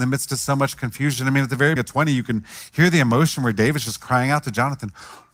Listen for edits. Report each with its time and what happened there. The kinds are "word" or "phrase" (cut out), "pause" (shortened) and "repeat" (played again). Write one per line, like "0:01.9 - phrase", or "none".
0:01.8 - word